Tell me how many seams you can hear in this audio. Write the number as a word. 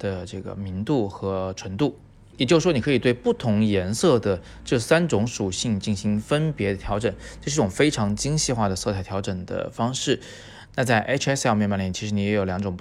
zero